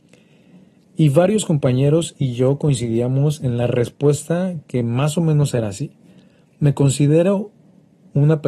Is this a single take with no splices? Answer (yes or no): yes